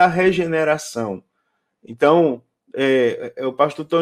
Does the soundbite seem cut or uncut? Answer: uncut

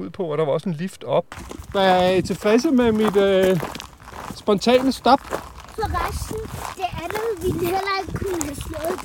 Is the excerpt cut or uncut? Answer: uncut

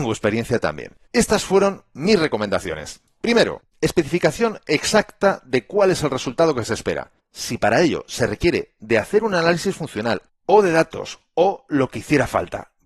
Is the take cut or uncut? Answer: cut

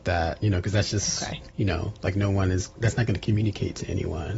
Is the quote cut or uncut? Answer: uncut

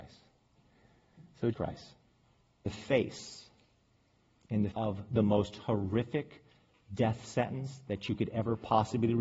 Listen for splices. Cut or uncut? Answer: cut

